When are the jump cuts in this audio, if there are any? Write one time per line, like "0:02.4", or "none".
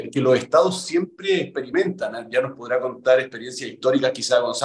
none